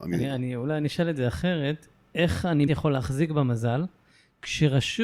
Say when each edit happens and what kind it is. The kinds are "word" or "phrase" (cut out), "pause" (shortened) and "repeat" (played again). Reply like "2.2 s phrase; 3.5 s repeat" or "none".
2.7 s word